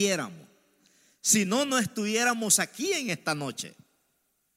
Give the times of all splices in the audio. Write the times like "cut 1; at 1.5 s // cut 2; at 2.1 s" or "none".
none